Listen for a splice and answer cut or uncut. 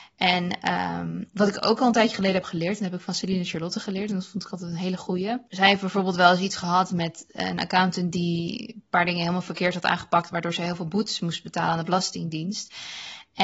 uncut